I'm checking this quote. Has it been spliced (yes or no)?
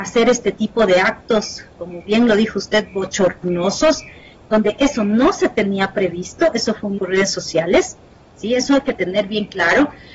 yes